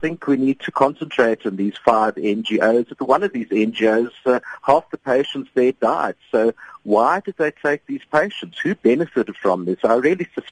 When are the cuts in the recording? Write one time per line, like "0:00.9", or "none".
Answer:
none